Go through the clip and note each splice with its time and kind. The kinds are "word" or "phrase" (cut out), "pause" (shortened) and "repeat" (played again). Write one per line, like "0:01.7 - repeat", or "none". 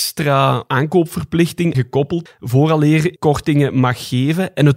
0:01.7 - word
0:02.3 - word
0:03.2 - word